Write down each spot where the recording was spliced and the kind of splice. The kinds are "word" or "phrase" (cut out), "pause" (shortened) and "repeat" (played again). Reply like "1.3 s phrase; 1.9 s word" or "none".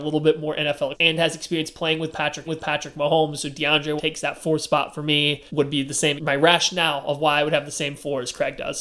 0.9 s word; 2.5 s repeat; 4.0 s word; 5.5 s pause; 6.2 s word